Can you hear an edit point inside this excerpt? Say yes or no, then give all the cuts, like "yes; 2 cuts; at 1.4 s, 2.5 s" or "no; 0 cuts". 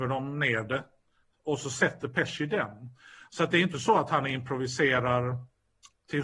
no; 0 cuts